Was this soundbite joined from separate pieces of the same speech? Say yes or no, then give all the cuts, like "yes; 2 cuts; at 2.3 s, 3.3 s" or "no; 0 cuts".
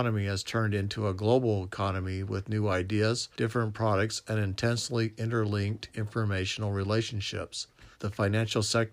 yes; 2 cuts; at 3.3 s, 7.9 s